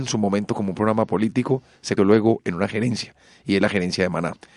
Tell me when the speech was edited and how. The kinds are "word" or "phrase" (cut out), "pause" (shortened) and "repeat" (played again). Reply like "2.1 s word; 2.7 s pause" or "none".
2.0 s word

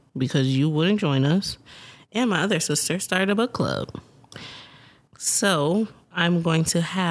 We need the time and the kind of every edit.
none

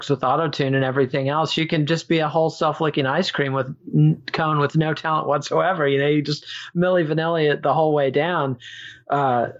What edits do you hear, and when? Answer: none

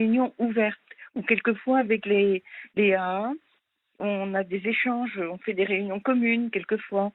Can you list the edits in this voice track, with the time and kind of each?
none

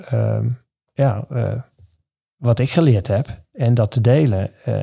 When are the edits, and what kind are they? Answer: none

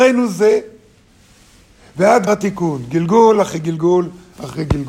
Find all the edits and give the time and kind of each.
2.3 s word

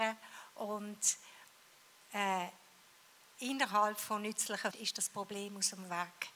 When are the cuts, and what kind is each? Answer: 4.7 s word

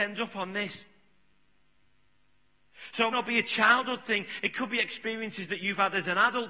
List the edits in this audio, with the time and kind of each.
3.1 s word

